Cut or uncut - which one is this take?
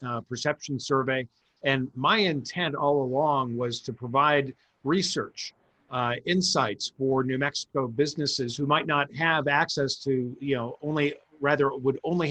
uncut